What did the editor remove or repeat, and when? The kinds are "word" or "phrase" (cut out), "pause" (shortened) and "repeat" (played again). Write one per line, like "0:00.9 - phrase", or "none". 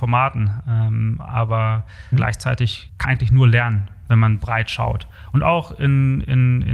0:02.1 - word
0:03.0 - word